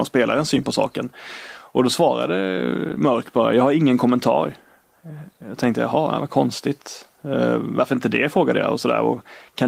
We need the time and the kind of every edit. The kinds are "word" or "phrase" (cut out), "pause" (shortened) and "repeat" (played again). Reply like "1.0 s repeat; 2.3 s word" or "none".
none